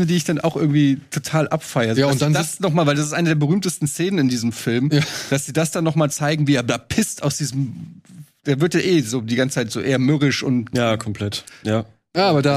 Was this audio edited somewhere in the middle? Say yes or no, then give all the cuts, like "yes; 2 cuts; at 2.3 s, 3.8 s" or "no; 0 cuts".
no; 0 cuts